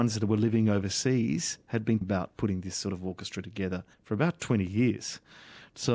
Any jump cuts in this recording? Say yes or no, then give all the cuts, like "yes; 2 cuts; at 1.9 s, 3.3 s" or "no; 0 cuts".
yes; 2 cuts; at 2.0 s, 3.9 s